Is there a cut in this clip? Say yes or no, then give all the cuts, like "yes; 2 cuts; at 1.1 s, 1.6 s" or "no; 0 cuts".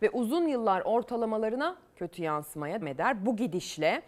yes; 1 cut; at 2.8 s